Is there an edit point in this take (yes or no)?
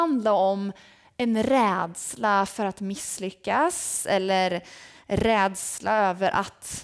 no